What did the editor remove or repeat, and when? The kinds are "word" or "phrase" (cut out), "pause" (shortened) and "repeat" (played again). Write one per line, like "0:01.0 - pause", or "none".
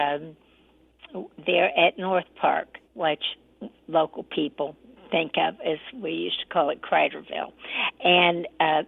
0:02.8 - pause